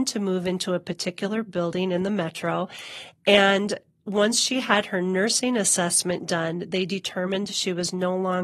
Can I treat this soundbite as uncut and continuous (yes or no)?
yes